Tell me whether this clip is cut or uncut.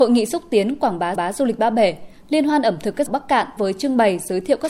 cut